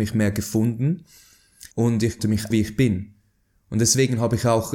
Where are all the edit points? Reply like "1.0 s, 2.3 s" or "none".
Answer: 1.7 s, 2.2 s, 2.5 s